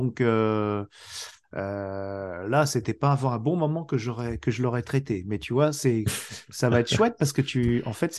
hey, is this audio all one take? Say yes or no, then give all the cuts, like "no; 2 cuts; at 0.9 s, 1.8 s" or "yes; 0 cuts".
yes; 0 cuts